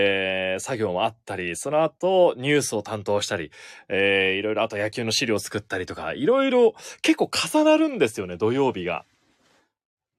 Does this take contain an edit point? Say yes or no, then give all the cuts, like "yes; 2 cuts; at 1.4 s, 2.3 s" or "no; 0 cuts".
no; 0 cuts